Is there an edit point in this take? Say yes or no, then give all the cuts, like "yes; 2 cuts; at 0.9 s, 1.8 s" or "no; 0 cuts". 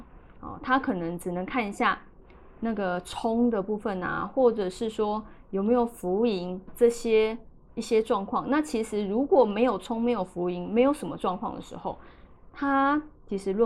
yes; 1 cut; at 6.7 s